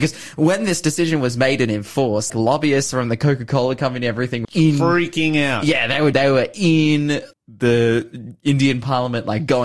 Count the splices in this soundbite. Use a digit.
4